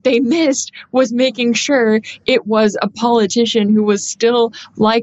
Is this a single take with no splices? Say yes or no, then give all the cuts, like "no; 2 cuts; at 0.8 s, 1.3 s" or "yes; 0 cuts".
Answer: yes; 0 cuts